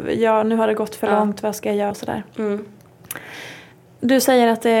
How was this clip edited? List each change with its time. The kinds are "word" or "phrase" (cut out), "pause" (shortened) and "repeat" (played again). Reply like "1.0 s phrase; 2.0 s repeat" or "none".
1.9 s word